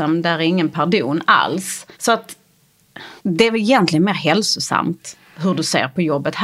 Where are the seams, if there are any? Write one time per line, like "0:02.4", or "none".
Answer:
0:01.9
0:03.2